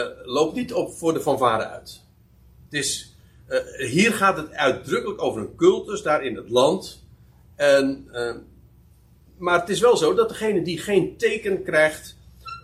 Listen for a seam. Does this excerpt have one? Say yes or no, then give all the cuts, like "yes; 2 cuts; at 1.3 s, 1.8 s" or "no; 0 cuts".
no; 0 cuts